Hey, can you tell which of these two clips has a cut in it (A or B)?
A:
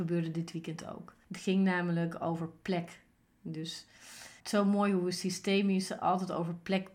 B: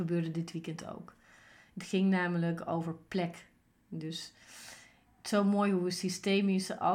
A